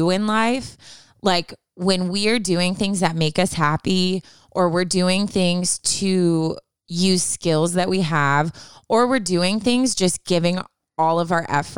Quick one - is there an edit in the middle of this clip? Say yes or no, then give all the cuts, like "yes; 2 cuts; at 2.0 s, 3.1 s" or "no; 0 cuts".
no; 0 cuts